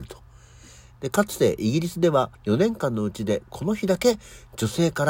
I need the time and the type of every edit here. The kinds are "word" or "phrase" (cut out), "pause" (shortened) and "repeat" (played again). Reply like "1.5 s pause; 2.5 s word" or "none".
2.3 s pause